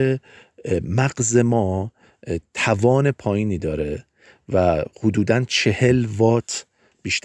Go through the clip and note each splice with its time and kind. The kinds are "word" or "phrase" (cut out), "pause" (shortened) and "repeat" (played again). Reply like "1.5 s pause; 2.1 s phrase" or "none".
none